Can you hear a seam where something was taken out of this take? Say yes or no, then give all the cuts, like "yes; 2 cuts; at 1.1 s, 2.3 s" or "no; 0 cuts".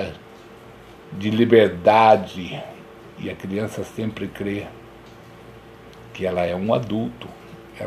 no; 0 cuts